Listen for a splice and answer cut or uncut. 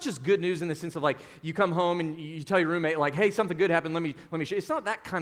uncut